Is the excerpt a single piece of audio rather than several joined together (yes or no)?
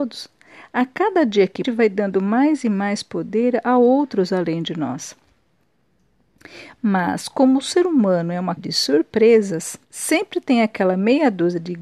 no